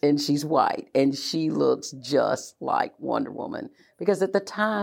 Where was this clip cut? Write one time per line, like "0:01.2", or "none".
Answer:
none